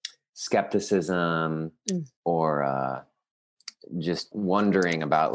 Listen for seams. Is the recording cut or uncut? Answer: cut